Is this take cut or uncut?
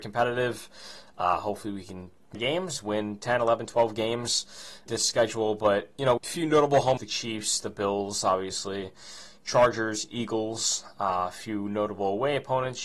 cut